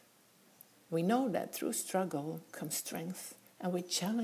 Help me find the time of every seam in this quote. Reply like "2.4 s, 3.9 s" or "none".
none